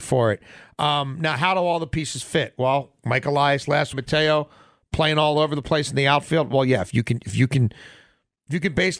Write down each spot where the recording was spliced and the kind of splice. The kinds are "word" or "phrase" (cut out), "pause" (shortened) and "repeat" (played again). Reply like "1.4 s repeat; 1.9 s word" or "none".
3.9 s phrase